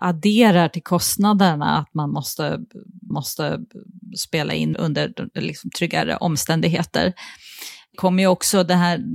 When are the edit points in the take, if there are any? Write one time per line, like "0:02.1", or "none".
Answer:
0:03.1
0:04.7
0:07.9